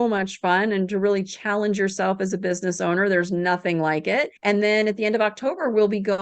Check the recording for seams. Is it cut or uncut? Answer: cut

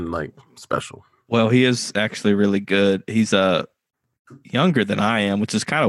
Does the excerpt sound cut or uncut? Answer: uncut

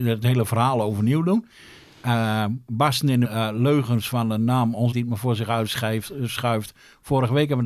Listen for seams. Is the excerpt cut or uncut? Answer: cut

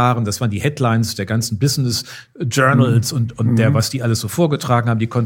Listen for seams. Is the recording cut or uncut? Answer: uncut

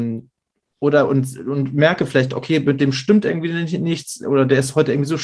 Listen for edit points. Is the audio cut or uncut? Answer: uncut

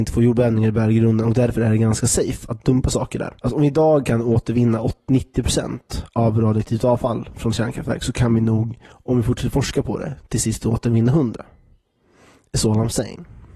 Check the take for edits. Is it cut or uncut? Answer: cut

